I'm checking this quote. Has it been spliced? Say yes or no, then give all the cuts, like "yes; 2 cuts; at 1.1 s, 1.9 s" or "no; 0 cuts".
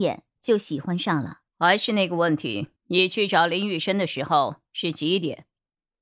yes; 2 cuts; at 1.5 s, 2.8 s